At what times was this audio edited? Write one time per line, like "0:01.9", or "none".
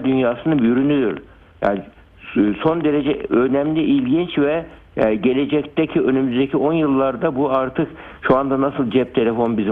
none